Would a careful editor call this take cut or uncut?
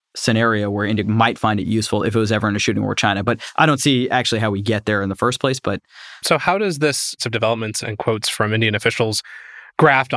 cut